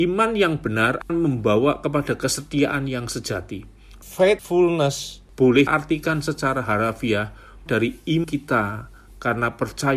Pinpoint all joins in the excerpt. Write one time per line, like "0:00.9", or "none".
0:01.1
0:05.7
0:07.7
0:08.2